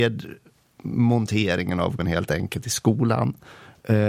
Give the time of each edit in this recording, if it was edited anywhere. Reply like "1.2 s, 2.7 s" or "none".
2.0 s